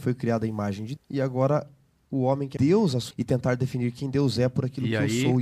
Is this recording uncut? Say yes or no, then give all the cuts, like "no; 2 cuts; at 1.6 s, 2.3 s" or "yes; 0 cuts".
no; 3 cuts; at 1.0 s, 2.6 s, 3.1 s